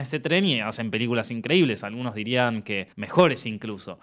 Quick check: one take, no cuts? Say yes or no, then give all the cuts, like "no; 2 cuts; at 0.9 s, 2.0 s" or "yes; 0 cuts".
no; 1 cut; at 2.9 s